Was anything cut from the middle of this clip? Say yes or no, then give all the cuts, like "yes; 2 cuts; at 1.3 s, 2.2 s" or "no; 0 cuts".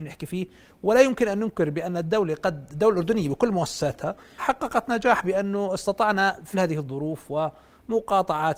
yes; 2 cuts; at 4.4 s, 6.5 s